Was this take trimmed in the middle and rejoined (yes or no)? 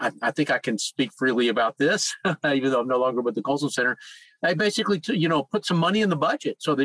no